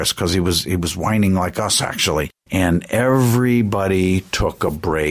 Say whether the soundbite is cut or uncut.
uncut